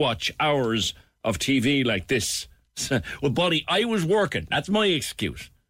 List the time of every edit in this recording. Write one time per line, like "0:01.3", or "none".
none

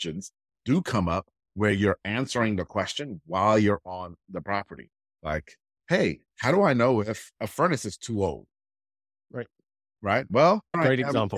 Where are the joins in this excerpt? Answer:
none

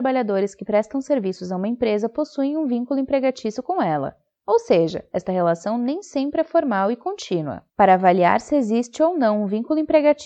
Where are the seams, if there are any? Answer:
0:07.7

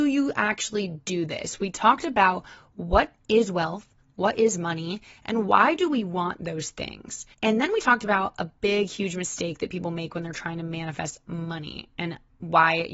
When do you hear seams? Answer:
0:07.3

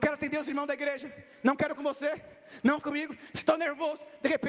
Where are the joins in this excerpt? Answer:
0:01.7
0:02.8

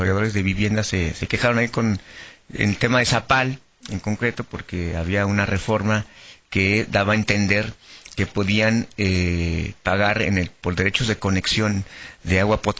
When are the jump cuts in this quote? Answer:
none

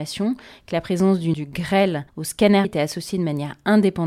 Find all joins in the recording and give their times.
0:01.3
0:02.1
0:02.6

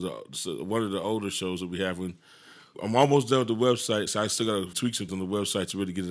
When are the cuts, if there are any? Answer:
0:02.7
0:04.1
0:04.7
0:05.1

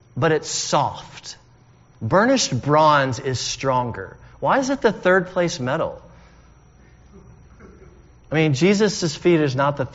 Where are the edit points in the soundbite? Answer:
none

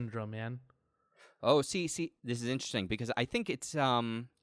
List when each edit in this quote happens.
0:02.2

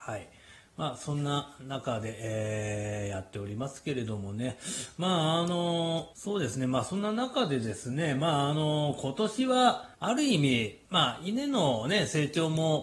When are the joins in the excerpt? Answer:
0:06.1
0:09.9
0:10.8

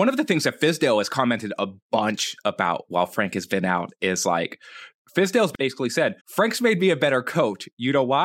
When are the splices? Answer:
0:04.9
0:06.2

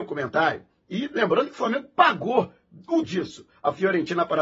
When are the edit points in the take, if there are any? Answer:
0:03.0

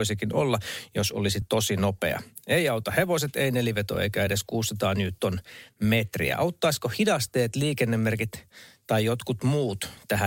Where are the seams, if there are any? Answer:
none

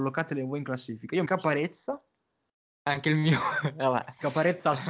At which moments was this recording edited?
0:01.3

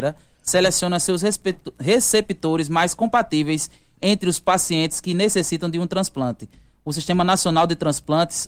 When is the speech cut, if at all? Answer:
none

